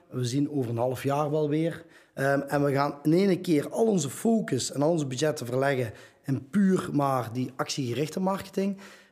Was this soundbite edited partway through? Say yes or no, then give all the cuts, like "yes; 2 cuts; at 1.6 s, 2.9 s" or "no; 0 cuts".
no; 0 cuts